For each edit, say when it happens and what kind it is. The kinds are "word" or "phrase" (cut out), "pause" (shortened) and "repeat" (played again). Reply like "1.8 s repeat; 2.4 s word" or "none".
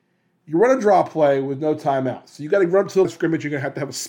3.0 s word